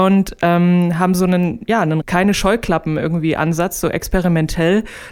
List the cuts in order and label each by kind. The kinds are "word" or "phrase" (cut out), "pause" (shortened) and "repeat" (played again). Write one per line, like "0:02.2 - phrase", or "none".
0:02.0 - word